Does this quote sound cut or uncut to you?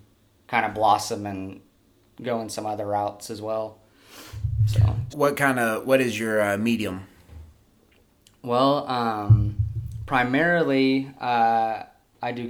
cut